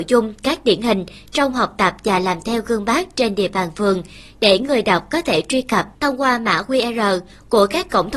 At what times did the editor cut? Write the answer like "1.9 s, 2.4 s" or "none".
none